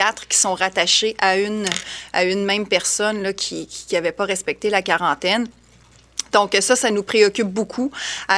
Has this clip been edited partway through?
no; 0 cuts

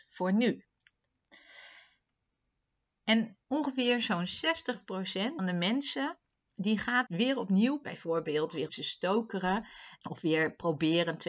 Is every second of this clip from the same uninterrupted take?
no; 7 cuts; at 3.4 s, 5.4 s, 6.3 s, 7.1 s, 7.8 s, 8.7 s, 10.0 s

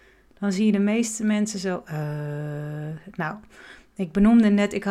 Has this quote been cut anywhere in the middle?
no; 0 cuts

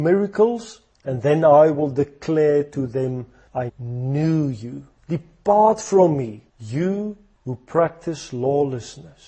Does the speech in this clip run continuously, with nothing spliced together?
no; 2 cuts; at 3.7 s, 6.5 s

